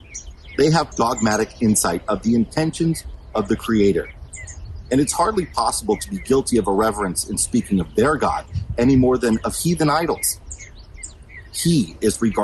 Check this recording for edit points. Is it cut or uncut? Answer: cut